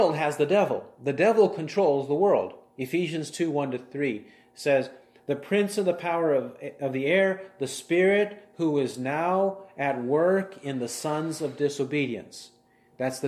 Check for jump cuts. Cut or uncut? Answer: uncut